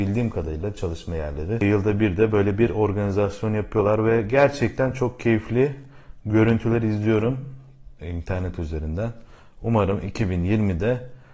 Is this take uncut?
yes; 0 cuts

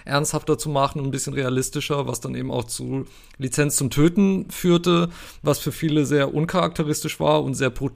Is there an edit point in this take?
no; 0 cuts

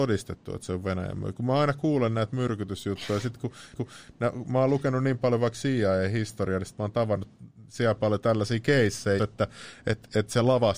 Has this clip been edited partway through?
yes; 2 cuts; at 3.7 s, 9.2 s

